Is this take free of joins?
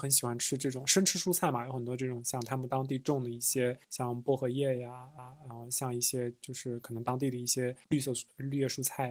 no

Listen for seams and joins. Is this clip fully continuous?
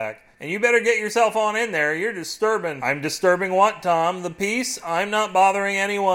yes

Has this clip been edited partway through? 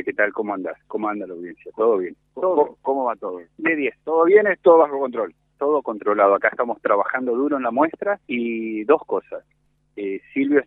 yes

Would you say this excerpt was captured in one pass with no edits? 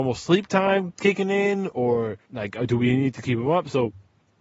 no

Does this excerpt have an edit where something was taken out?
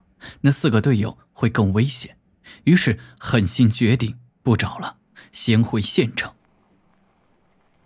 yes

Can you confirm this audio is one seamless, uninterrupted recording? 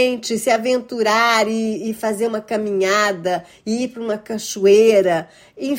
yes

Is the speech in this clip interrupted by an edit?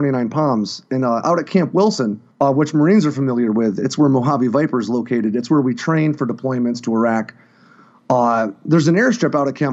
yes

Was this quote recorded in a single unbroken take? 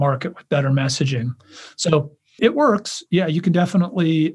no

